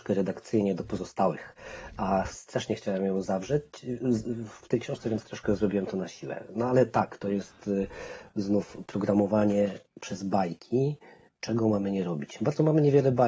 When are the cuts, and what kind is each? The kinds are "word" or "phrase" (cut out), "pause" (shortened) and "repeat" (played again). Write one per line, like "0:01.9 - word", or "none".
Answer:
none